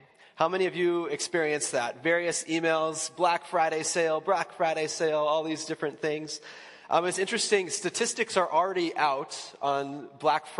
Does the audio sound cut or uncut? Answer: uncut